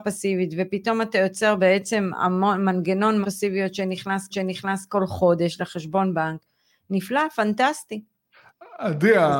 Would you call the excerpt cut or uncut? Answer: cut